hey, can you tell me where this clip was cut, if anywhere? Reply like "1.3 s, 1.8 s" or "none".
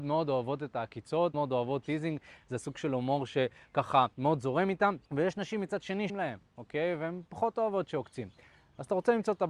1.3 s, 4.1 s, 5.1 s, 6.1 s